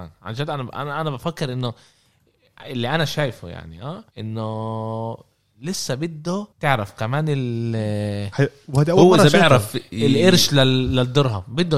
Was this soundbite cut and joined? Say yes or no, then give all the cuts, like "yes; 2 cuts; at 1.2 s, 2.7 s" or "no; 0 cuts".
yes; 2 cuts; at 4.1 s, 6.5 s